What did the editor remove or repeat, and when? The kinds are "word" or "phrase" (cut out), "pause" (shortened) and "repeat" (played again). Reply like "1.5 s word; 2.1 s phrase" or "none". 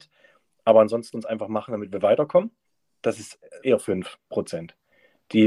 1.1 s word; 2.6 s pause; 3.6 s phrase; 4.2 s pause